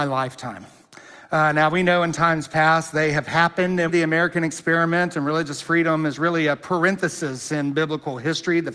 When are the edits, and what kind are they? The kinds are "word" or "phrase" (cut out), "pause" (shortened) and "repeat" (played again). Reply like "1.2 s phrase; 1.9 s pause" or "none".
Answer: 3.9 s phrase